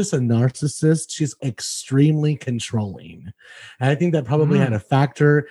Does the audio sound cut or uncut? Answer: cut